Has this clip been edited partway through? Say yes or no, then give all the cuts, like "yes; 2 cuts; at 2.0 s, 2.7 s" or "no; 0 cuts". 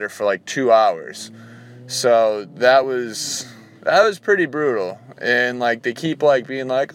no; 0 cuts